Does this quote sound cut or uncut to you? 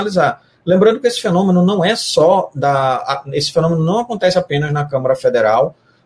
uncut